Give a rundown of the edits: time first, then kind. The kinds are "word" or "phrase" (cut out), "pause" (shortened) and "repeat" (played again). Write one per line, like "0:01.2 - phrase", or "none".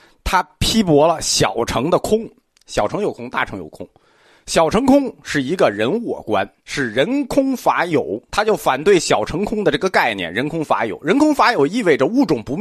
0:02.4 - pause
0:06.6 - pause
0:08.3 - pause